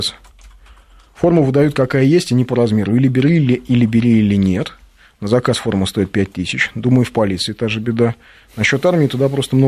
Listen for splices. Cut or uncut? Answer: uncut